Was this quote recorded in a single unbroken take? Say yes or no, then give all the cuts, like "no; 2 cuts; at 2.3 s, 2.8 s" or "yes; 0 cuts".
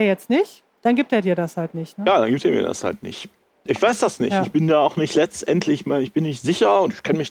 yes; 0 cuts